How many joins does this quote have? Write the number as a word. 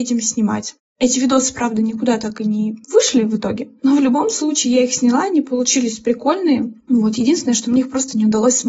two